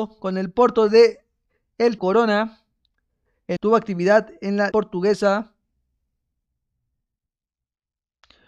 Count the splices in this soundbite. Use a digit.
3